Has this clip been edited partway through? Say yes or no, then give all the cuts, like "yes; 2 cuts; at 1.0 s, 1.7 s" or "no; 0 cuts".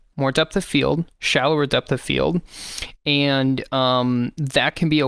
no; 0 cuts